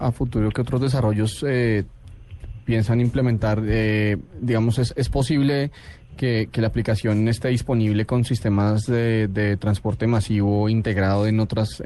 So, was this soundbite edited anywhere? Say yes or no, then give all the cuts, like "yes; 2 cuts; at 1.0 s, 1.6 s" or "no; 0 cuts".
no; 0 cuts